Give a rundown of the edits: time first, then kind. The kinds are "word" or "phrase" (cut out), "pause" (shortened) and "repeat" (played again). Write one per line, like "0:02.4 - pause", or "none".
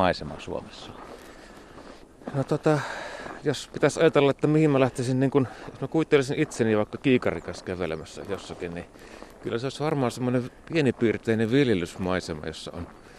none

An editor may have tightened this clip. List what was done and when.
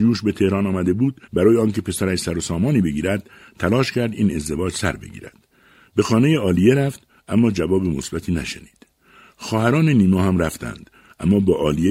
0:01.3 - pause

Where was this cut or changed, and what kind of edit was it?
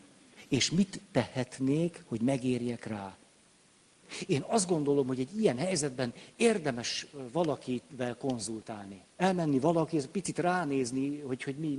0:09.1 - pause

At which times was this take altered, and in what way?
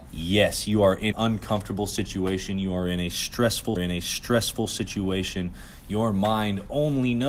0:01.1 - word
0:03.8 - repeat

